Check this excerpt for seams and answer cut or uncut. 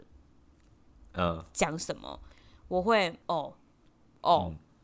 cut